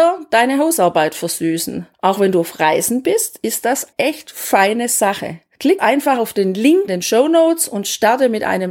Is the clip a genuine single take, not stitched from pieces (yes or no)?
no